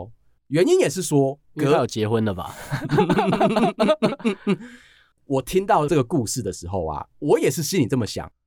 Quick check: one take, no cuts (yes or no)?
no